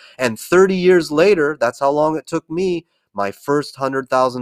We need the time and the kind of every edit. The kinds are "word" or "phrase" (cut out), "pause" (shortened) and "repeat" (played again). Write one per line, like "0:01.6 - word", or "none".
none